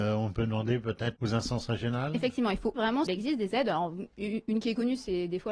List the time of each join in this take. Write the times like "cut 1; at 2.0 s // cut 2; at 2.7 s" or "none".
cut 1; at 1.2 s // cut 2; at 2.8 s // cut 3; at 3.1 s